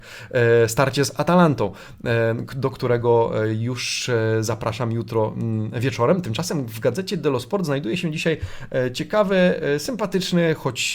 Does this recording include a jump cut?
no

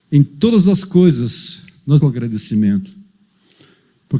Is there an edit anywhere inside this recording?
yes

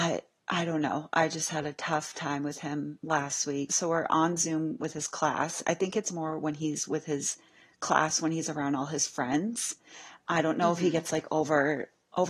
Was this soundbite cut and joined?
no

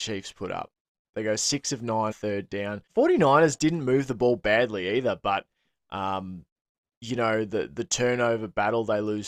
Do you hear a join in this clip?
yes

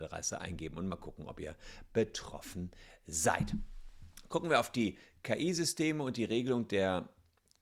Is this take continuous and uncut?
yes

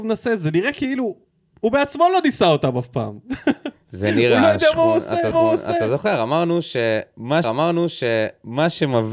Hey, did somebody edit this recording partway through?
yes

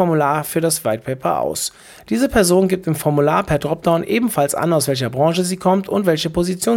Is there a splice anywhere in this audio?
no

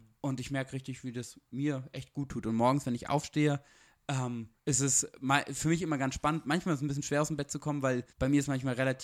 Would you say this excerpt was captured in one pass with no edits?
no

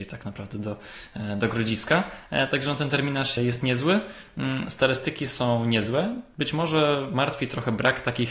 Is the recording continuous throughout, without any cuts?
no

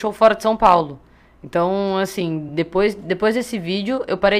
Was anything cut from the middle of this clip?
no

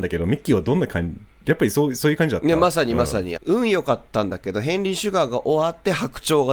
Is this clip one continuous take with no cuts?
no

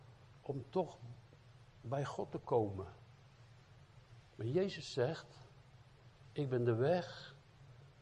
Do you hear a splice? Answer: no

